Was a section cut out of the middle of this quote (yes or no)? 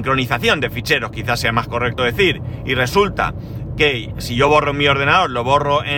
no